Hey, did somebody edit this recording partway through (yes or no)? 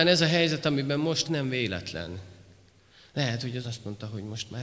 yes